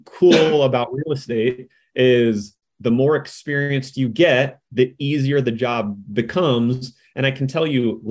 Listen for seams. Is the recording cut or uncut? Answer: uncut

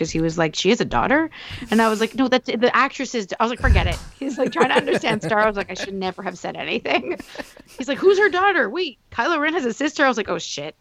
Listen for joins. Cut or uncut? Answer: uncut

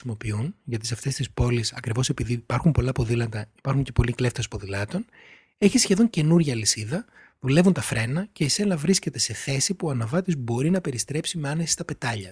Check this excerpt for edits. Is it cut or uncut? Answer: uncut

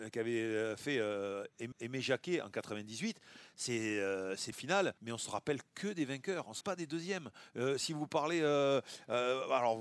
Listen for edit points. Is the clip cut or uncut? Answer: cut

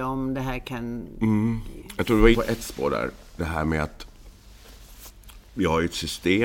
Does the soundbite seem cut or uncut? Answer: cut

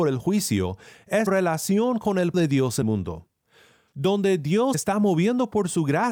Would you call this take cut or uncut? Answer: cut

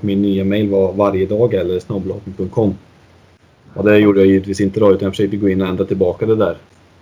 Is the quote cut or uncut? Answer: uncut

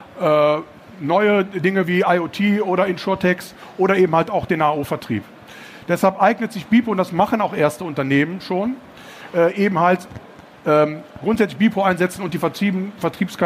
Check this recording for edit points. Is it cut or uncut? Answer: uncut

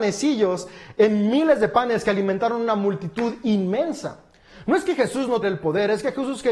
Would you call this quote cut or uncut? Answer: cut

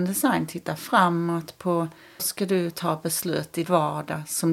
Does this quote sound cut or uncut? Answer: cut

